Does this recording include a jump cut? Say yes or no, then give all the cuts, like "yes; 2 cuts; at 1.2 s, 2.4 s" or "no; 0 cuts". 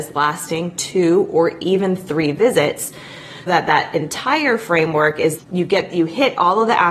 yes; 2 cuts; at 3.5 s, 5.4 s